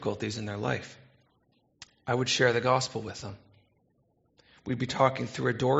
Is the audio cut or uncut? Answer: uncut